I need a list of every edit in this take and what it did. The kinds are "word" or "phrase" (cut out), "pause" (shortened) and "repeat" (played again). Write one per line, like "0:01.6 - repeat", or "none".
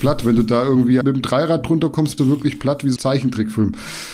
0:01.0 - phrase
0:02.2 - word
0:03.0 - word